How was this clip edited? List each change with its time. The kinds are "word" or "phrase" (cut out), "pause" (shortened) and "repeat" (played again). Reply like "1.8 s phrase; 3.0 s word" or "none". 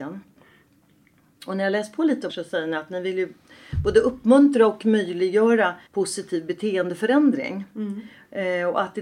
2.3 s word; 5.9 s pause